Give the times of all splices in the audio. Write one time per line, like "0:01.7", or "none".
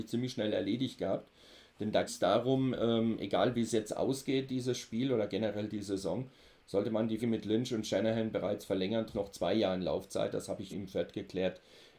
0:02.1
0:07.2
0:09.1
0:10.7